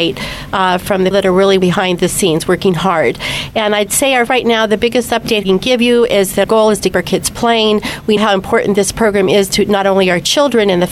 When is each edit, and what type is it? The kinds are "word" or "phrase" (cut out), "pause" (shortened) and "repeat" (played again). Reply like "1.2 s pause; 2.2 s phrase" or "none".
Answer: 1.1 s word; 1.6 s word; 4.3 s word; 5.4 s word; 6.4 s word; 6.9 s word; 8.2 s word